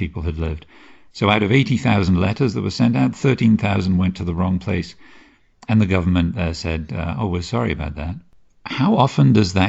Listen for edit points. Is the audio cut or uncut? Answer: uncut